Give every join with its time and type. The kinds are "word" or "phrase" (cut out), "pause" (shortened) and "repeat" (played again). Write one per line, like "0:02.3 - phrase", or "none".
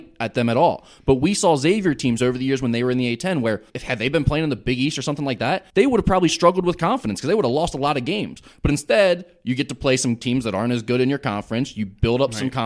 0:03.7 - pause
0:05.7 - pause